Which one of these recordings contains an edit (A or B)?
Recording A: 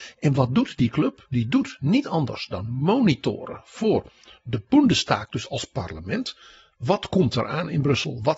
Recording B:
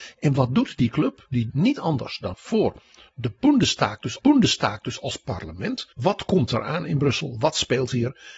B